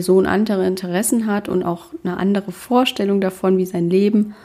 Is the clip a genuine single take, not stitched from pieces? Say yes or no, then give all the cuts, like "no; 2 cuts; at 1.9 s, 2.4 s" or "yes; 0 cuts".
yes; 0 cuts